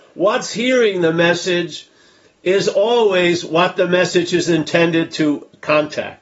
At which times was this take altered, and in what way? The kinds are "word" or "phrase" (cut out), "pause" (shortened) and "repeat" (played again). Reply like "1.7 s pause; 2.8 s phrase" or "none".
none

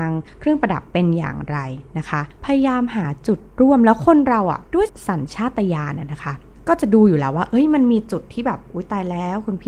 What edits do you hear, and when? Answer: 4.7 s pause

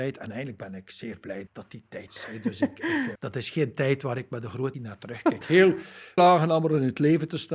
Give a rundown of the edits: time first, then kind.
1.5 s word; 2.1 s word; 3.2 s word; 4.7 s word; 5.4 s word; 6.2 s word

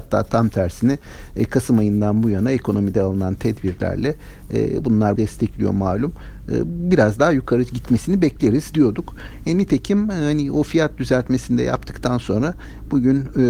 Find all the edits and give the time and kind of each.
5.2 s word

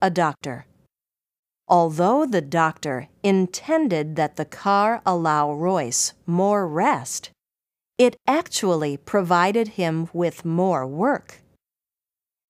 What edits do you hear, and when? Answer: none

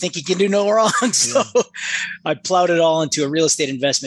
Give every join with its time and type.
none

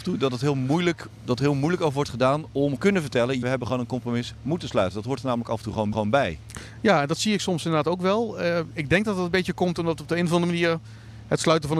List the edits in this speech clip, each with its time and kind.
2.8 s phrase; 3.4 s phrase; 5.9 s repeat

